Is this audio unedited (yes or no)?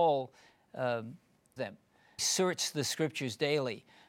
no